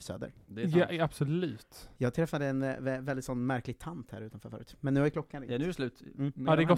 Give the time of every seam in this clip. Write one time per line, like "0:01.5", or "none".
0:01.9